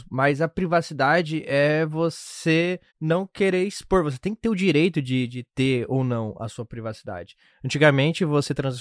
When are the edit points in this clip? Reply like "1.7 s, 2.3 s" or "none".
2.9 s